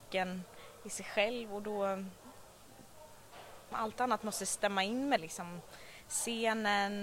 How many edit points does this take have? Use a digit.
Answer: 2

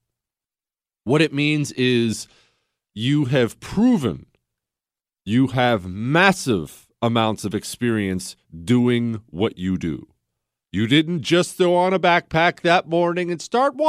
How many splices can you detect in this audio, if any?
0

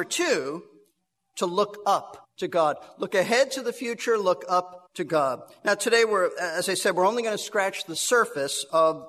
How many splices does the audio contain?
2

